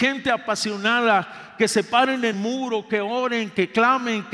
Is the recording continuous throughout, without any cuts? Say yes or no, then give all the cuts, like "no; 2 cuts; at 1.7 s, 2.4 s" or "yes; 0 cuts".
no; 1 cut; at 2.3 s